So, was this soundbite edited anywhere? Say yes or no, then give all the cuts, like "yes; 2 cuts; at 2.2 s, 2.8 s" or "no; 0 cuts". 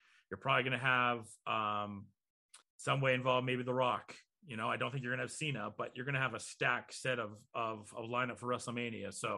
yes; 1 cut; at 2.6 s